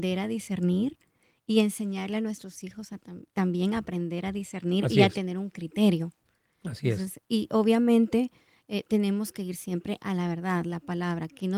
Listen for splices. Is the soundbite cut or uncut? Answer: uncut